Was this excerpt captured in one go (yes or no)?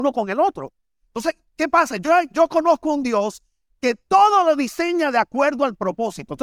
yes